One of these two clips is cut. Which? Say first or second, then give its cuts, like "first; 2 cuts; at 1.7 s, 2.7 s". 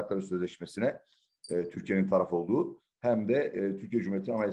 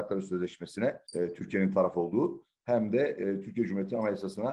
second; 1 cut; at 1.1 s